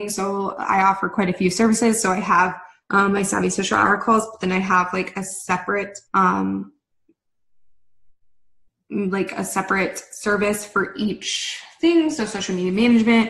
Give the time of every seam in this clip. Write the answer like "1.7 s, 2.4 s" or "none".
2.8 s, 6.1 s